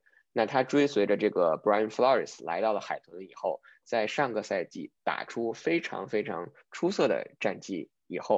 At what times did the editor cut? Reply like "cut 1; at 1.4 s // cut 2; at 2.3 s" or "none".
cut 1; at 5.0 s